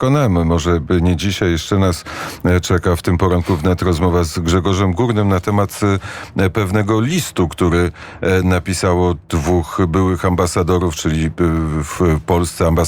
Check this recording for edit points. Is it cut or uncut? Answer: uncut